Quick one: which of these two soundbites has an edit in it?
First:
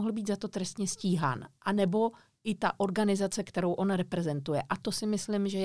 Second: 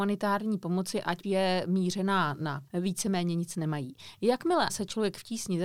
second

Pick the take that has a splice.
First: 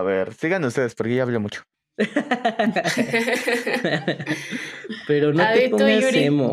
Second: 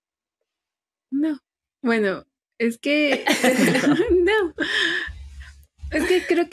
first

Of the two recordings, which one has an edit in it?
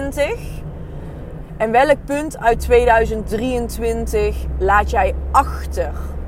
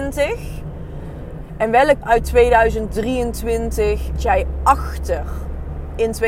second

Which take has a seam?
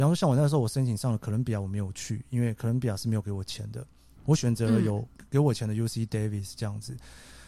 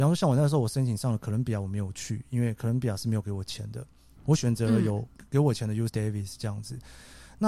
second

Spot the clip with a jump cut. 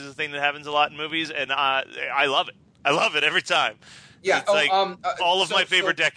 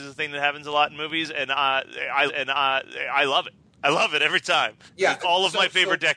second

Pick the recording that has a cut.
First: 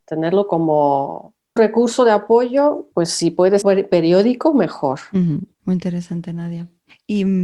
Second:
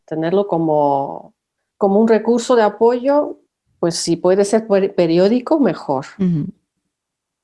first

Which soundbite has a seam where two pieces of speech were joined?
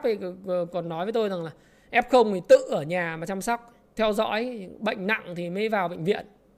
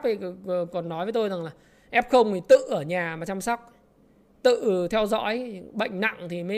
first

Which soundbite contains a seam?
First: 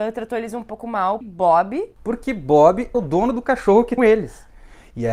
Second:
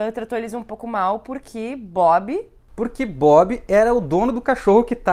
first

